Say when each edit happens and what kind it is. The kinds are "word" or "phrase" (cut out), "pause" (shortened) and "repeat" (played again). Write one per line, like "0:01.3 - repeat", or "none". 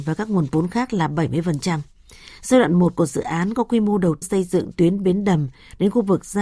0:04.2 - word
0:04.8 - phrase